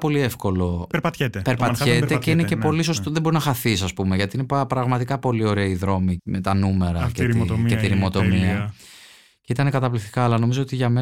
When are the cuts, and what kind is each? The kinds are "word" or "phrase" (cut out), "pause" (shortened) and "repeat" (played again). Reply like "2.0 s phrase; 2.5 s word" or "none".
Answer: 6.2 s word